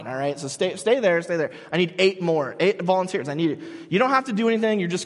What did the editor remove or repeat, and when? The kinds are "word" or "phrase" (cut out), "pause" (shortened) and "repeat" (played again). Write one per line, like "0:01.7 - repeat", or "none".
none